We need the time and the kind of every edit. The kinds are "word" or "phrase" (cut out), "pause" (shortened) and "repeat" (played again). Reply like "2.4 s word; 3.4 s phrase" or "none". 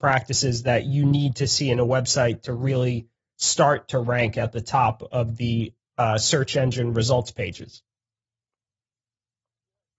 none

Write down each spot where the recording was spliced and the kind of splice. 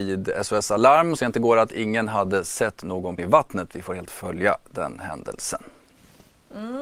1.2 s word; 3.2 s word; 4.1 s word

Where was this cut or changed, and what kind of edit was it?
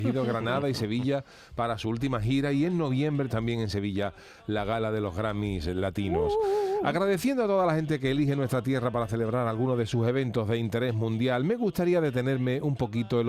3.3 s word

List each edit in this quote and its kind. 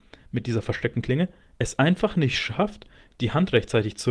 none

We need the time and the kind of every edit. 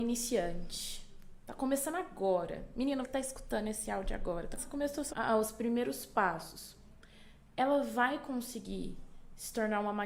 3.0 s word; 4.6 s word; 5.1 s phrase

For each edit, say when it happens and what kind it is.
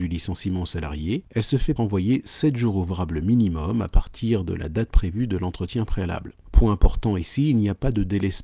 1.8 s phrase

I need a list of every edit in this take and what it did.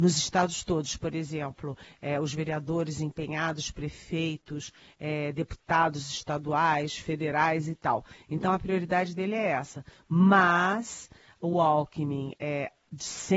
none

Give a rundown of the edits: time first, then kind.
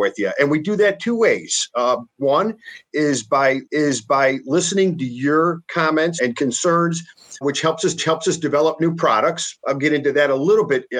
3.6 s repeat; 6.2 s word; 7.4 s word; 8.0 s repeat

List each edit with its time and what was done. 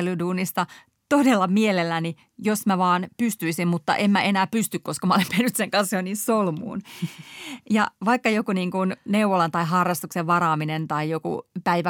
none

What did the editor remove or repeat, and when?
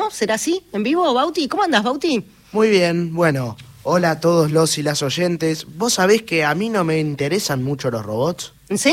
none

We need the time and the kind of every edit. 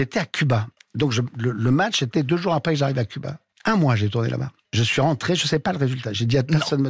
none

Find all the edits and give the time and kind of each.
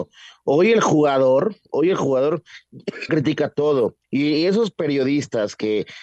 3.1 s word; 4.0 s pause

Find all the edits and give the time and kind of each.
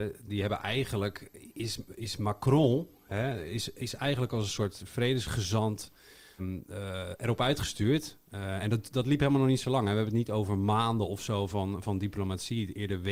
6.4 s word

